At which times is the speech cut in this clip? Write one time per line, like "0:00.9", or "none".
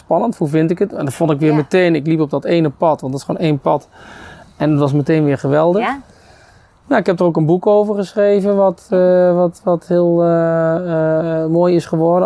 none